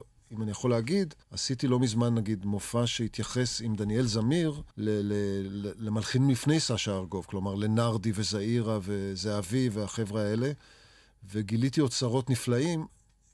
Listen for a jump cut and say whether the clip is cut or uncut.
cut